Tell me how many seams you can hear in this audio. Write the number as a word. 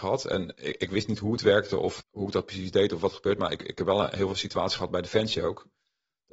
one